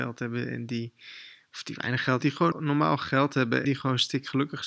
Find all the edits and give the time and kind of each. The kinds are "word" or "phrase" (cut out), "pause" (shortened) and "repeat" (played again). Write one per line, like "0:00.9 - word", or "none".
0:02.2 - word
0:02.5 - word
0:03.6 - word